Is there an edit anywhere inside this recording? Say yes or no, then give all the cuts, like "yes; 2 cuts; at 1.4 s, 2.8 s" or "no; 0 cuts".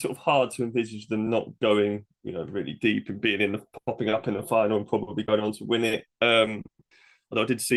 no; 0 cuts